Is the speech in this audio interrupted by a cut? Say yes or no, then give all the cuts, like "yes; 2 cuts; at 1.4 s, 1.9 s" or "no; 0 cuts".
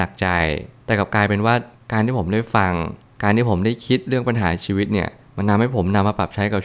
no; 0 cuts